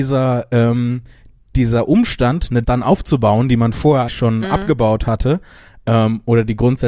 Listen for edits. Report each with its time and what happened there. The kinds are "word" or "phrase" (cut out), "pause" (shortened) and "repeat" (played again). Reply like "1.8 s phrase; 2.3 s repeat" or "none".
2.6 s word; 4.1 s word